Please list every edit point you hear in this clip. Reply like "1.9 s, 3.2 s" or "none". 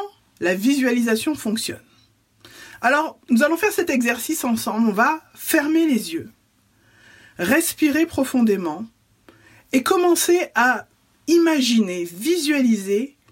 3.2 s